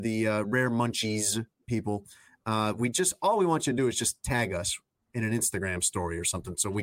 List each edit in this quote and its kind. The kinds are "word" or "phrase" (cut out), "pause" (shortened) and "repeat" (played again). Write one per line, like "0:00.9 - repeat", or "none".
none